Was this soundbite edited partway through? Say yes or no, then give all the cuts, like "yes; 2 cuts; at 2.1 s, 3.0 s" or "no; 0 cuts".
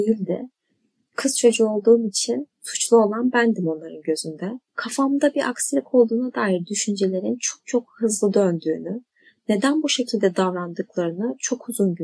yes; 2 cuts; at 2.5 s, 4.7 s